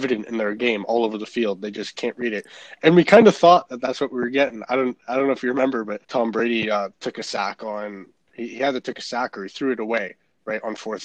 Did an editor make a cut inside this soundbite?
yes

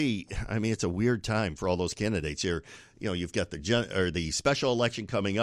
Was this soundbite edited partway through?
no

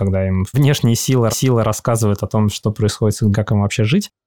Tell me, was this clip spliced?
yes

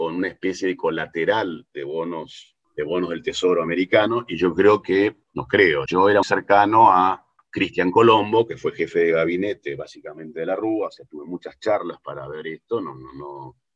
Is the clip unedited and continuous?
no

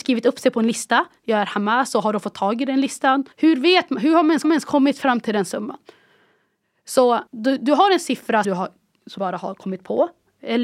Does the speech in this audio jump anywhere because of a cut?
yes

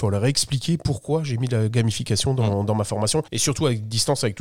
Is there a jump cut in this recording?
yes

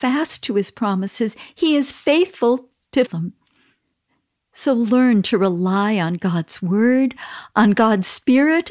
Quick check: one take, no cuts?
no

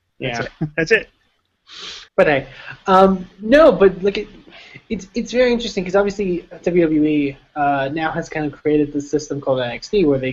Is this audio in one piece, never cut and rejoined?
no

